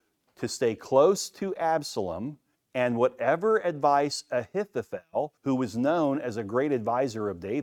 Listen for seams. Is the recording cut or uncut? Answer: cut